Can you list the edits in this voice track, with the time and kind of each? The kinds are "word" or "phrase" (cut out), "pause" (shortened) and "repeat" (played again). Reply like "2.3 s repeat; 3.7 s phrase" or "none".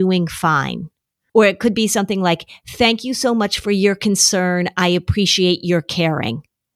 none